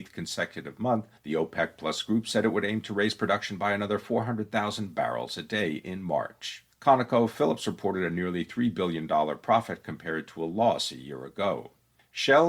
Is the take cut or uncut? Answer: cut